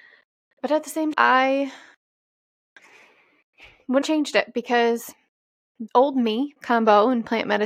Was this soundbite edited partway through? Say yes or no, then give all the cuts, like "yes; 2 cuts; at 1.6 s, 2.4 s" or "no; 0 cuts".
yes; 4 cuts; at 1.1 s, 4.0 s, 5.9 s, 6.6 s